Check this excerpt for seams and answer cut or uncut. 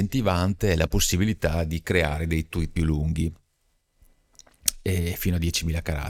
cut